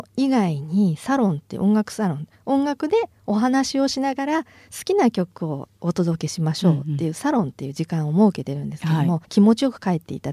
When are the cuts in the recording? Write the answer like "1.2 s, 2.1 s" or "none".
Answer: 9.2 s